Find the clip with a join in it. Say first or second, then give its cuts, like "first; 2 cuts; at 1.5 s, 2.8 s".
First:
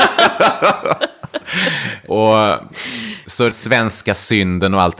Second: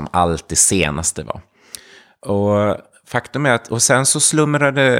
first; 2 cuts; at 2.1 s, 3.5 s